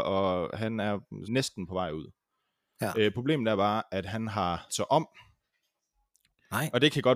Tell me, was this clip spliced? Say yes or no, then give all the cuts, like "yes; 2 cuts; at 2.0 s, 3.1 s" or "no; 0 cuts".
yes; 2 cuts; at 1.3 s, 4.7 s